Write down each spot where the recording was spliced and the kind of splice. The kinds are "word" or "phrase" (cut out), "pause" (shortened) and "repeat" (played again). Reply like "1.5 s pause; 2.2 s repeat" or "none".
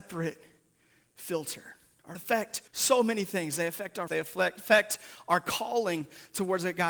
2.1 s word; 2.7 s pause; 4.1 s word